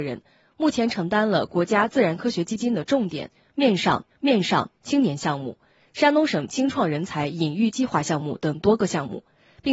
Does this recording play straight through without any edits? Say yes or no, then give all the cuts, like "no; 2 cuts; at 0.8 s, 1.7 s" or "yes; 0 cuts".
no; 1 cut; at 4.1 s